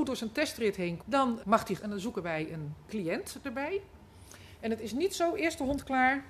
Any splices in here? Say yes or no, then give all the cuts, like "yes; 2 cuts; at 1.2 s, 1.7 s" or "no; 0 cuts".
yes; 3 cuts; at 1.0 s, 1.4 s, 1.8 s